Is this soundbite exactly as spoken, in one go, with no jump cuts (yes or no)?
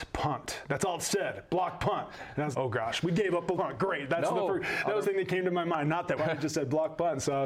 no